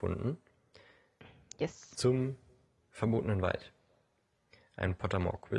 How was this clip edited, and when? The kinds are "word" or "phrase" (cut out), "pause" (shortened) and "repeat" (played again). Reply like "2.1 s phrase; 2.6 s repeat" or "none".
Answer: none